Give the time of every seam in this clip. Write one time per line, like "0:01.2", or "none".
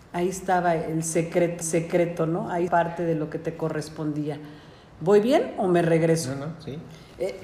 0:01.6
0:02.7